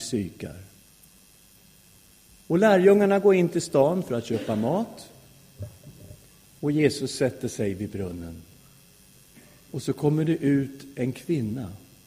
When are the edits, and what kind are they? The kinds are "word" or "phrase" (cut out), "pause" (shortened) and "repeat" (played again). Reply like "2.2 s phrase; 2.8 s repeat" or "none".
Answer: none